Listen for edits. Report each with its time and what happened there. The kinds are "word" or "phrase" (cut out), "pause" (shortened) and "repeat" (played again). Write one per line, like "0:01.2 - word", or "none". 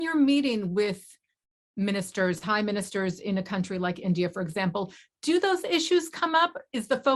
none

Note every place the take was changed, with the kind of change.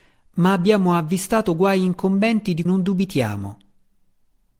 0:02.7 - word

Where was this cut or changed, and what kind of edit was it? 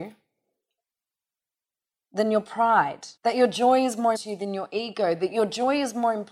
0:03.2 - pause
0:04.1 - word

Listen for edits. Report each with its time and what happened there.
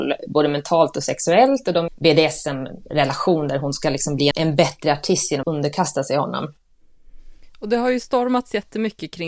0:01.9 - phrase
0:04.3 - word
0:05.4 - word

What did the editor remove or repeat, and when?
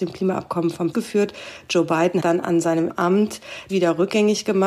0:00.9 - word
0:02.2 - word
0:02.9 - phrase
0:03.7 - word

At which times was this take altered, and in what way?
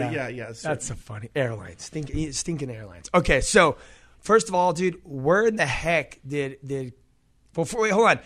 none

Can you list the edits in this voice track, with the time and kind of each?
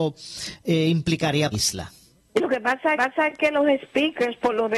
0:01.5 - phrase
0:03.0 - repeat

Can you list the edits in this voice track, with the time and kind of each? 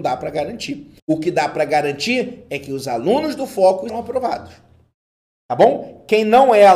0:01.0 - pause
0:03.9 - word

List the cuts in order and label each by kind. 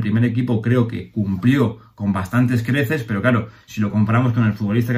none

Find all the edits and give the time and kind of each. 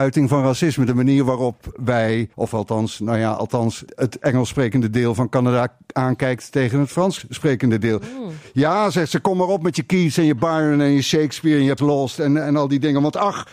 0:02.3 - pause
0:03.9 - word
0:11.8 - word

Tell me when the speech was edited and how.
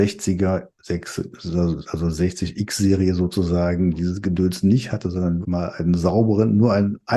0:05.4 - word

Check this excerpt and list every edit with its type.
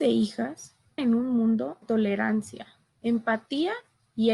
0:01.0 - word
0:01.8 - word

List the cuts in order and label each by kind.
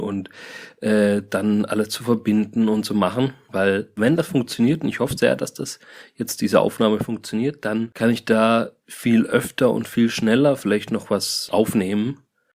none

